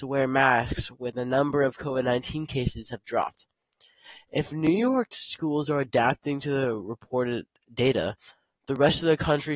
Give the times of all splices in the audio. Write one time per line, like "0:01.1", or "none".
none